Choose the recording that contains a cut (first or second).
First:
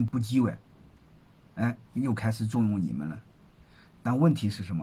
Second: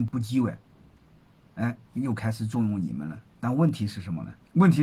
second